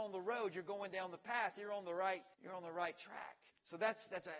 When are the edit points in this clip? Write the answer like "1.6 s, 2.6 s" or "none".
2.3 s, 3.5 s